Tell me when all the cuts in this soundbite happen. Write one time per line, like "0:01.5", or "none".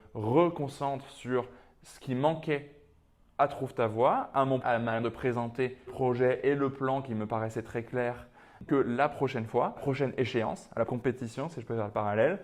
0:04.6
0:05.0
0:05.9
0:08.7
0:09.8
0:10.9

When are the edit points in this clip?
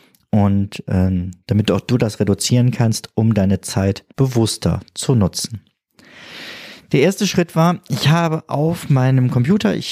0:01.4
0:04.1

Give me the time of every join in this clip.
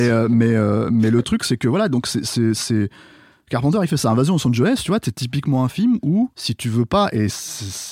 0:06.3

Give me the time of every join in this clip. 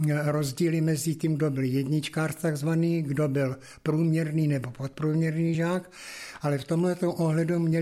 none

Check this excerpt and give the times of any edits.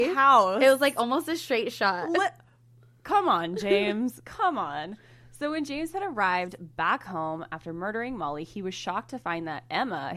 none

